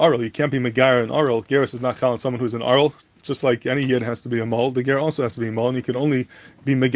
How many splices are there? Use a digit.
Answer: 0